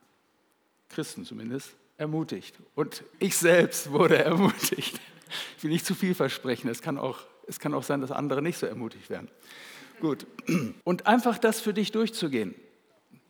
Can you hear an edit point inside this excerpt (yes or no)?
yes